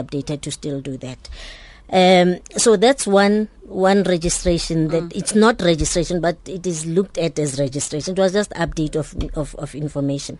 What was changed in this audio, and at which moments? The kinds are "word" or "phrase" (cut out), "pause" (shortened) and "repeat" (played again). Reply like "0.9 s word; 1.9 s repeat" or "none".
none